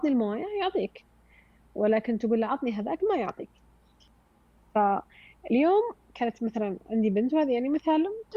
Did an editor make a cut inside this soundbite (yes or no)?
no